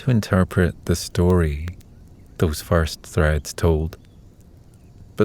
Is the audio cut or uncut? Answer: uncut